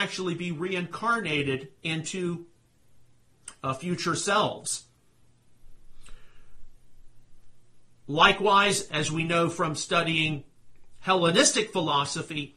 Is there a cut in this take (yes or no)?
no